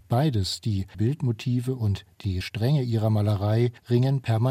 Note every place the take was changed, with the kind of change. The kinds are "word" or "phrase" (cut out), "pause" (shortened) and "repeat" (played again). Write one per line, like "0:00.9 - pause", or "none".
0:00.9 - phrase
0:02.4 - word